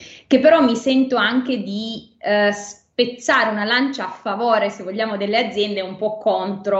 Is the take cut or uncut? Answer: uncut